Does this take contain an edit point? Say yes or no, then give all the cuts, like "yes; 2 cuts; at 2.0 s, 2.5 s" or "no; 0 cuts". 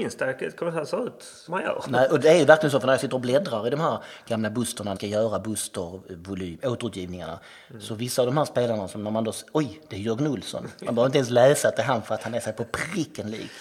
yes; 2 cuts; at 1.5 s, 5.0 s